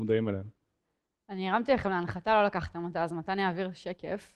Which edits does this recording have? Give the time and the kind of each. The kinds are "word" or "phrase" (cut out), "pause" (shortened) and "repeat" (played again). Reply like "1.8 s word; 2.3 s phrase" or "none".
none